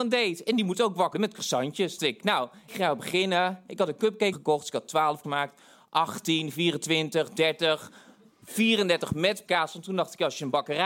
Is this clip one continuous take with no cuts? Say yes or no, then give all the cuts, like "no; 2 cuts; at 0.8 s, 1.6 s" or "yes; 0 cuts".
no; 6 cuts; at 1.1 s, 2.0 s, 2.7 s, 4.3 s, 5.2 s, 9.5 s